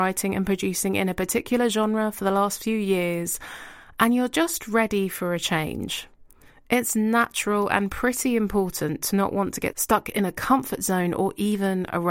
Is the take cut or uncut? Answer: uncut